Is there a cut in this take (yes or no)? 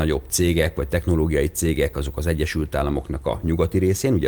no